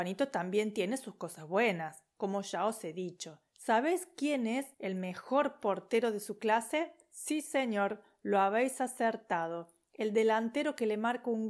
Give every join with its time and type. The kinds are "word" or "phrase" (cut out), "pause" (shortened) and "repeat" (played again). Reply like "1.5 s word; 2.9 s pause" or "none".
3.5 s pause; 4.7 s pause